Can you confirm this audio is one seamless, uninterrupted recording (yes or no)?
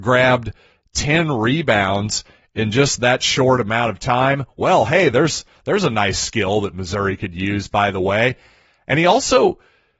yes